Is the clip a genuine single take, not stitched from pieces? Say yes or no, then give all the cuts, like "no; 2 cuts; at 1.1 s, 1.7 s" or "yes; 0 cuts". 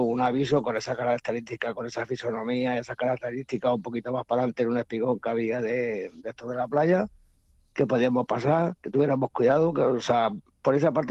yes; 0 cuts